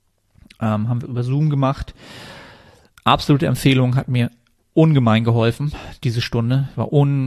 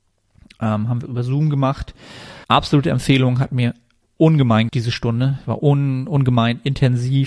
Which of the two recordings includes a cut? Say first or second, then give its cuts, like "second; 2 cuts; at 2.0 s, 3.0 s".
second; 2 cuts; at 2.4 s, 4.7 s